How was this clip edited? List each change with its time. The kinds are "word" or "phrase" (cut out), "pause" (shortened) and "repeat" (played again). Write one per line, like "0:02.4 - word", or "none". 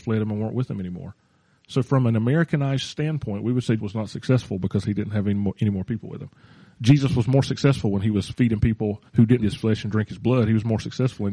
0:03.8 - word
0:09.1 - pause
0:09.4 - phrase